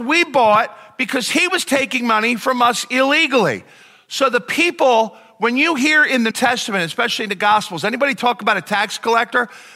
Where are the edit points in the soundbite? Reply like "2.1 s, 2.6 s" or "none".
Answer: 6.3 s